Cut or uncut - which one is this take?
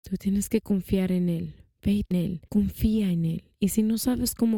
cut